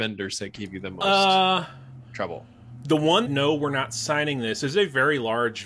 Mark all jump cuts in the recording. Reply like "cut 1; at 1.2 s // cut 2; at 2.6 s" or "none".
cut 1; at 3.3 s